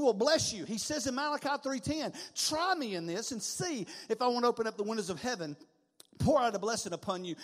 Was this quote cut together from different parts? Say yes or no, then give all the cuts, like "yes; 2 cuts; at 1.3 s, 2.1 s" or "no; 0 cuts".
no; 0 cuts